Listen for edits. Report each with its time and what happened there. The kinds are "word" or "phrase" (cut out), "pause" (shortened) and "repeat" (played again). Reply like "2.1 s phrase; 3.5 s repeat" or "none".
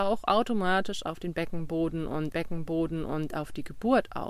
2.3 s repeat